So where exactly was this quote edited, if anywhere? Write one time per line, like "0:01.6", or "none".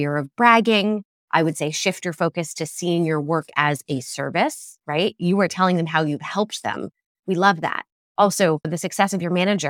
none